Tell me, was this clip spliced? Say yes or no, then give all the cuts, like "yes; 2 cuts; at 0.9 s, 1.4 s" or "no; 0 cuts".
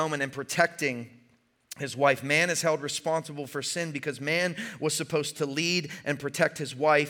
no; 0 cuts